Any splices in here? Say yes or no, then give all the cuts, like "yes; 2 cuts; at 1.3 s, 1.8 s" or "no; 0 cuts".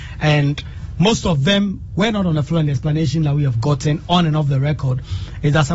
no; 0 cuts